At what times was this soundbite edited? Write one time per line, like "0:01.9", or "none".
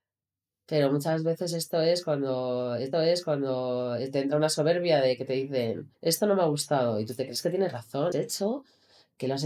0:02.9
0:05.9
0:08.1

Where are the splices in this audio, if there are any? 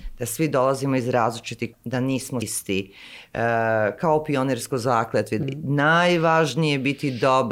0:01.7
0:02.4
0:05.4

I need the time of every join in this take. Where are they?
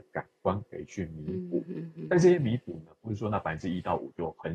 none

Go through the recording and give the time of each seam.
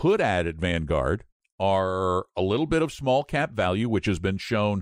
none

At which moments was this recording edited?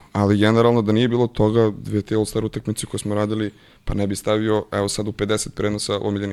none

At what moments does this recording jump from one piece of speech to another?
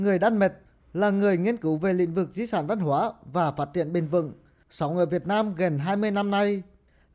none

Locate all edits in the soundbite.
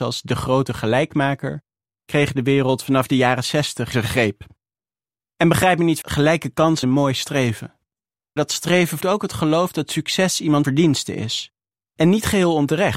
0:03.9
0:06.0
0:06.8
0:08.4
0:09.0
0:10.6

